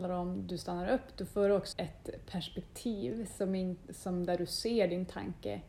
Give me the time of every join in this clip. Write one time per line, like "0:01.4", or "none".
0:01.7